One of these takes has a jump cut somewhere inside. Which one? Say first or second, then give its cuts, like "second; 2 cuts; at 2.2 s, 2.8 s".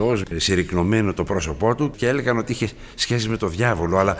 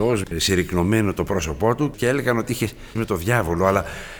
second; 1 cut; at 3.0 s